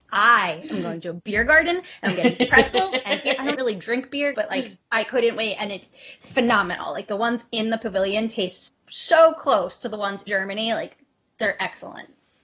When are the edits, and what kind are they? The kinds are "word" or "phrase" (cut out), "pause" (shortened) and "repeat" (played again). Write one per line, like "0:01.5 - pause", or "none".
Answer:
0:03.5 - word
0:04.3 - word
0:06.2 - word
0:08.7 - word
0:10.3 - word